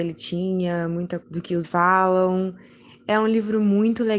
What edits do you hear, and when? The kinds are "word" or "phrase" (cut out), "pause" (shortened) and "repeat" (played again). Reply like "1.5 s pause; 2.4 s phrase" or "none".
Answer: 1.2 s word; 1.6 s word